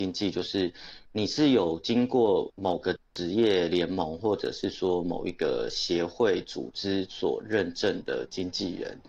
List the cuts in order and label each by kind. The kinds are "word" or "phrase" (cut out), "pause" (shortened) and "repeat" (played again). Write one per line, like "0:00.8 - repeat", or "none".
0:01.1 - pause